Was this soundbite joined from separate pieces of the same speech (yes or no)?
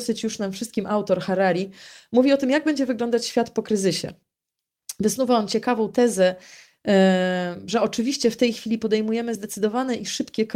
no